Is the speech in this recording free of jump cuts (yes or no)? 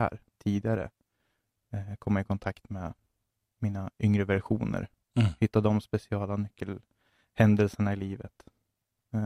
yes